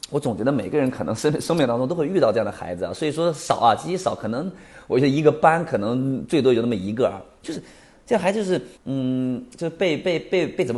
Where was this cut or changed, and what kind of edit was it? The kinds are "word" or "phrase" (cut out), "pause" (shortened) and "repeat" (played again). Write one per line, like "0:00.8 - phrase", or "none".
0:08.8 - pause